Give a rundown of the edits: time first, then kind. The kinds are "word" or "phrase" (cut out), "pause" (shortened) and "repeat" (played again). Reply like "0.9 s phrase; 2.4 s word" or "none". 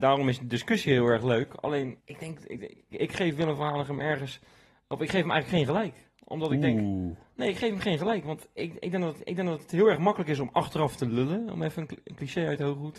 2.0 s pause; 2.9 s word; 9.2 s repeat